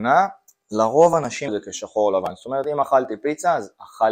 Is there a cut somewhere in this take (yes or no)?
yes